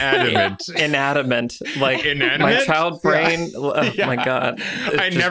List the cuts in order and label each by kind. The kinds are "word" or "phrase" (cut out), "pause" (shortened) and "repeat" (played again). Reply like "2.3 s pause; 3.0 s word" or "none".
none